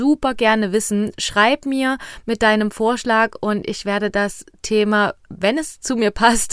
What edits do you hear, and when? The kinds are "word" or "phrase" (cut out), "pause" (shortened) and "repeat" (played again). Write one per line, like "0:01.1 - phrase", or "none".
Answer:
none